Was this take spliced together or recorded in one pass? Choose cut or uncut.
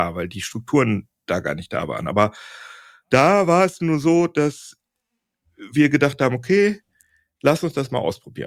uncut